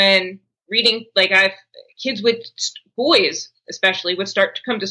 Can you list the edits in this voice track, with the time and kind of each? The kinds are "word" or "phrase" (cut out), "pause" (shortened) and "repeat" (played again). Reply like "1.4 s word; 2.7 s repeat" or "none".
1.9 s pause